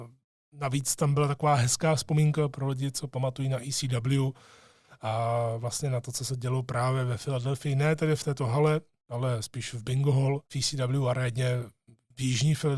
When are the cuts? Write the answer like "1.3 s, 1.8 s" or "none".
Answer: 10.4 s